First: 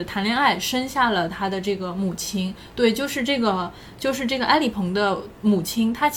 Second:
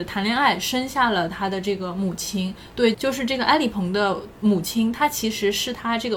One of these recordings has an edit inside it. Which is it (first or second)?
second